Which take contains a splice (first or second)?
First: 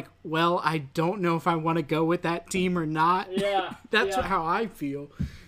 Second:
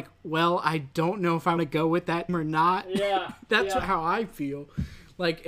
second